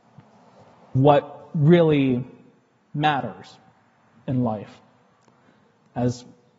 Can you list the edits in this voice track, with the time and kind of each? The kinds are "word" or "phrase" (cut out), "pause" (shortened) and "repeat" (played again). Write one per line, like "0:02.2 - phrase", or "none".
0:00.9 - word

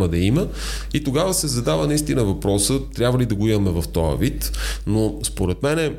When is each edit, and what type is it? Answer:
none

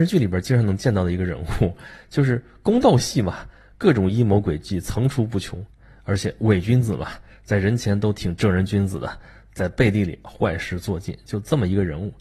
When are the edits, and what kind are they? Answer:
none

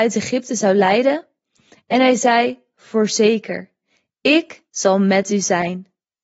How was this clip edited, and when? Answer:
none

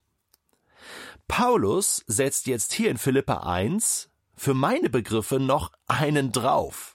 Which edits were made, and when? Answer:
0:05.8 - pause

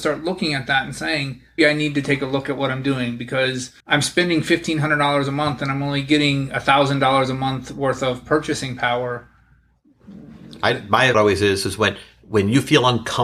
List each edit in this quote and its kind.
0:01.6 - word
0:03.8 - pause
0:11.1 - word

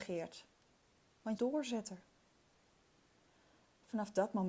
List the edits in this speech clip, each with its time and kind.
0:01.4 - phrase

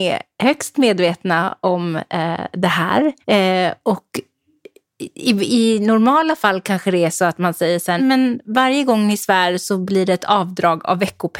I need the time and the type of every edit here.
0:03.2 - pause
0:08.0 - word

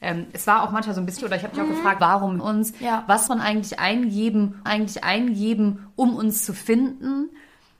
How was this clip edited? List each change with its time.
0:01.2 - word
0:02.0 - word
0:02.4 - phrase
0:03.3 - word
0:04.7 - repeat

